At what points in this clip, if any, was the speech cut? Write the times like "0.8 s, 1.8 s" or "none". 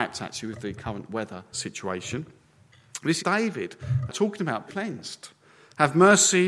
1.5 s, 3.2 s, 4.1 s, 4.7 s